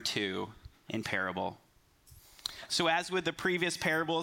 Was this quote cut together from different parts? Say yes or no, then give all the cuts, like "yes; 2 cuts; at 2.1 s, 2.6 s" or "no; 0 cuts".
yes; 1 cut; at 1.0 s